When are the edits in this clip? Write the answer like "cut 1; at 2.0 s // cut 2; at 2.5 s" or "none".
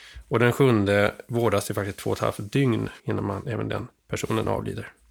cut 1; at 3.0 s // cut 2; at 4.0 s